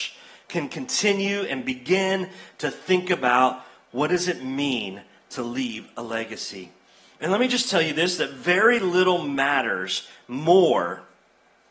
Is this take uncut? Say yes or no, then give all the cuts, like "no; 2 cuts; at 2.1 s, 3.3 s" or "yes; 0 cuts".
yes; 0 cuts